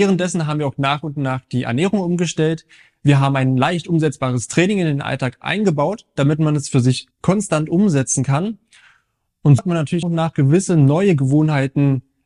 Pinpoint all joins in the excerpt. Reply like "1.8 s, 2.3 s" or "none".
7.1 s, 9.6 s, 10.0 s